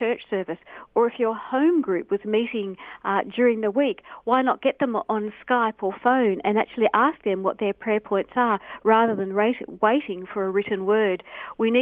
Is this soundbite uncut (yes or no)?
yes